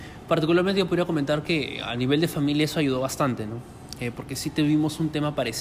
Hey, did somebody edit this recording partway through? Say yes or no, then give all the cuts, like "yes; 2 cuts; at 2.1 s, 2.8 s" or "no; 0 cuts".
no; 0 cuts